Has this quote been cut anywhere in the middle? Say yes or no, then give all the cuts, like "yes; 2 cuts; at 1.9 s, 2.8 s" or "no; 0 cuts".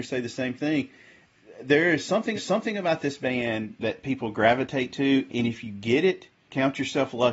yes; 4 cuts; at 2.3 s, 3.8 s, 5.3 s, 6.4 s